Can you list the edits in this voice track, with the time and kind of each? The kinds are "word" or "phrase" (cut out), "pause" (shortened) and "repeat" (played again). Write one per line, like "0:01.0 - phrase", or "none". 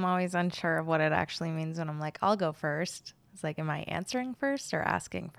none